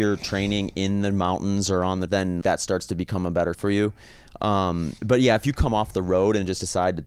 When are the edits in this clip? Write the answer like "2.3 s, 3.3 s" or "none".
2.1 s, 2.4 s, 3.5 s, 5.0 s